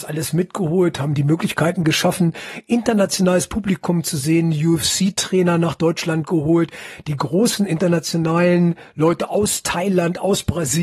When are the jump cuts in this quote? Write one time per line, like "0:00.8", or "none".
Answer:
none